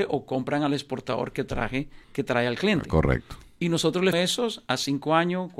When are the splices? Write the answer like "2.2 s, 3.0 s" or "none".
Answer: 2.0 s, 4.1 s